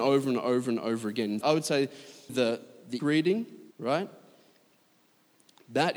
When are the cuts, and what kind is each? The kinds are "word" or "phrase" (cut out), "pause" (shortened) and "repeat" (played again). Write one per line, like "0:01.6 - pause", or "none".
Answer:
0:01.4 - word
0:02.3 - word
0:03.0 - word
0:03.7 - pause